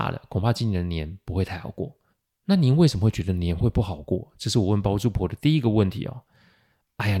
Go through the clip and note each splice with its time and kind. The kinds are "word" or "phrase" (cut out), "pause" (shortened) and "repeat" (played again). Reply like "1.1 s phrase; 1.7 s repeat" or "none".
2.1 s pause